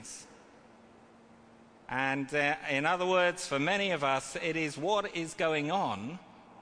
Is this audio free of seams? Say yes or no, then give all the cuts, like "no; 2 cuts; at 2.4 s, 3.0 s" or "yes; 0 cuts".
yes; 0 cuts